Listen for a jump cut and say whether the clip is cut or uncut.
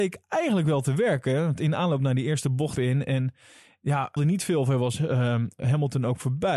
cut